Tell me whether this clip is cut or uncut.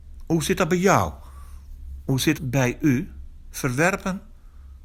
cut